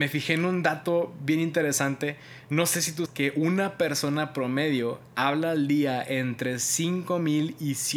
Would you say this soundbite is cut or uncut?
cut